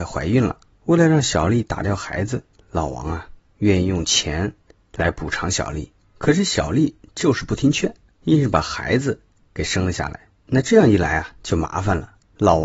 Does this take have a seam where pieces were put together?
no; 0 cuts

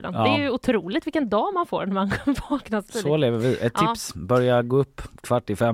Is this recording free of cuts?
yes; 0 cuts

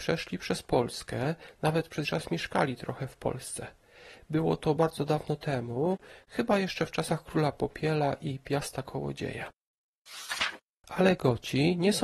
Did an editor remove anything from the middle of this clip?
yes; 3 cuts; at 2.0 s, 4.8 s, 10.7 s

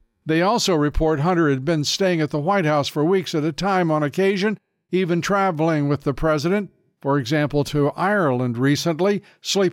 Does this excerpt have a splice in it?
no; 0 cuts

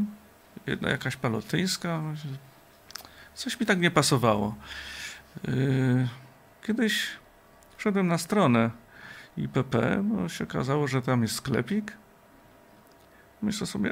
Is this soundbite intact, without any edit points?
yes; 0 cuts

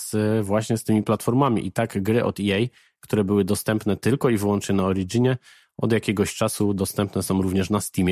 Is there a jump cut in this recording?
no; 0 cuts

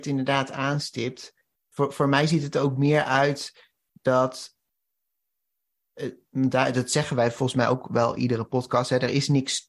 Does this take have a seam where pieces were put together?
no; 0 cuts

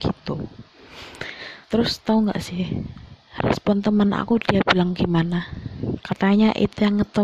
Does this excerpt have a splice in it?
yes; 1 cut; at 1.6 s

